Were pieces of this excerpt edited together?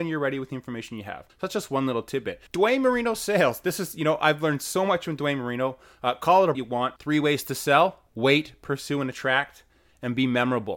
yes; 5 cuts; at 1.3 s, 2.5 s, 6.5 s, 7.0 s, 8.1 s

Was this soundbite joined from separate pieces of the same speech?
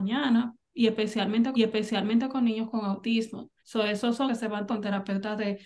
yes; 4 cuts; at 1.6 s, 3.6 s, 4.3 s, 4.7 s

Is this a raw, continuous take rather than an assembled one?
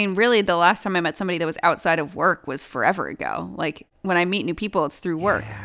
yes; 0 cuts

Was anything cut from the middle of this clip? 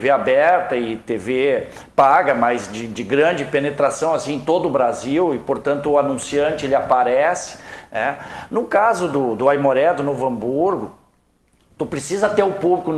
no; 0 cuts

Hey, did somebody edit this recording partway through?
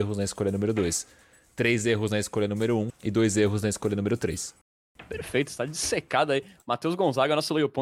yes; 1 cut; at 2.9 s

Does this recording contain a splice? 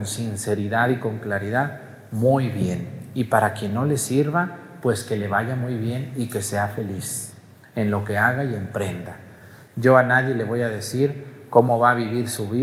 no; 0 cuts

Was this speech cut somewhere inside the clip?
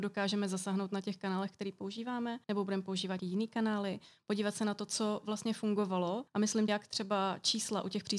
yes; 4 cuts; at 2.4 s, 3.2 s, 6.3 s, 6.7 s

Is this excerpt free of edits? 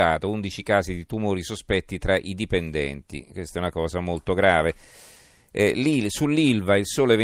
yes; 0 cuts

